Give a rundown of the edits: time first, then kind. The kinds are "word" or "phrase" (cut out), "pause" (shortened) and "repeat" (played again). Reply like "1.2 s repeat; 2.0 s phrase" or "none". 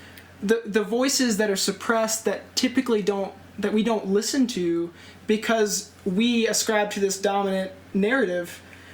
3.5 s pause; 7.9 s pause